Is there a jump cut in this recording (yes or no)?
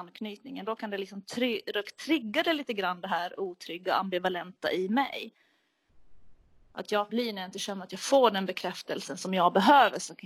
yes